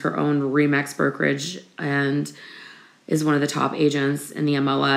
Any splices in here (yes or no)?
no